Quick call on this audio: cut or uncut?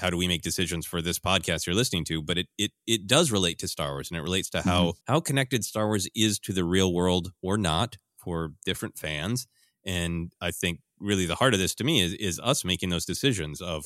cut